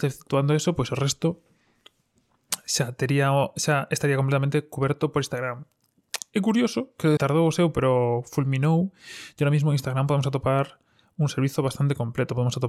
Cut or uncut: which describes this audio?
cut